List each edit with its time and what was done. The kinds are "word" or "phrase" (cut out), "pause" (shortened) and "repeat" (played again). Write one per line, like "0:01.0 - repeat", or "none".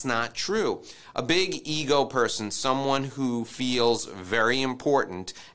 none